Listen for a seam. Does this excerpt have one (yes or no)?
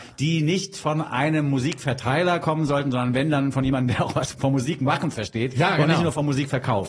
yes